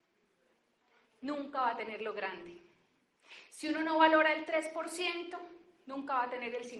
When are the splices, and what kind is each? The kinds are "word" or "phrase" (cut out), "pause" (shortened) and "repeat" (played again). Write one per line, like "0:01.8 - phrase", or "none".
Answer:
none

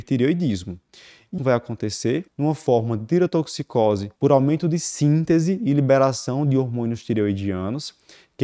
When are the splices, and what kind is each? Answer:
0:01.4 - phrase
0:02.3 - pause
0:04.2 - pause

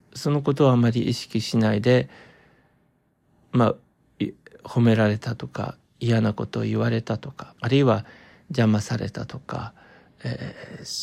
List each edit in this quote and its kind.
0:07.6 - pause

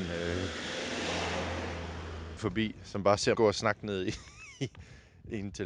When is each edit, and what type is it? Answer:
0:02.4 - word
0:03.3 - word

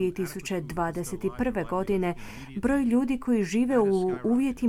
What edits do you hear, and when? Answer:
none

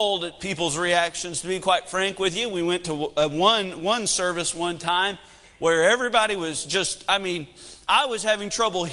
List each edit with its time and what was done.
none

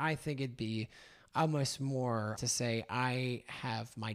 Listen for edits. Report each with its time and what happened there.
0:02.4 - phrase

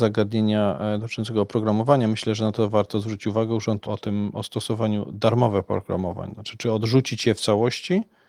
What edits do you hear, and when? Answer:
0:03.9 - word

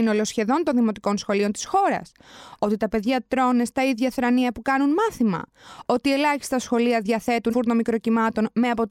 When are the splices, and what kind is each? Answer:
0:07.5 - phrase

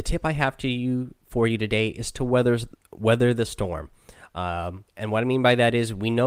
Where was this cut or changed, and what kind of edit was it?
0:04.9 - pause

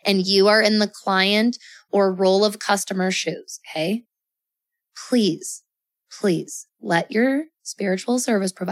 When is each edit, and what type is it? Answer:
none

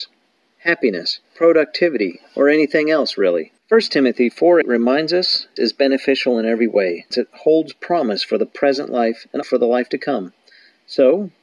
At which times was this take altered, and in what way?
0:01.2 - pause
0:03.6 - pause
0:04.6 - word
0:05.6 - word
0:07.1 - word
0:09.4 - word

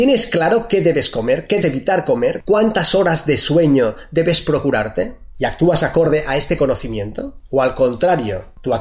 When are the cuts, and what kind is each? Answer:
0:01.6 - word

